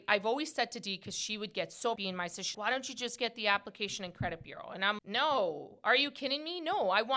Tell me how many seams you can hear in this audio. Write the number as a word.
three